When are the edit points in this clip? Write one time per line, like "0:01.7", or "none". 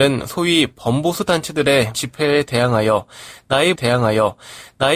0:01.9
0:03.8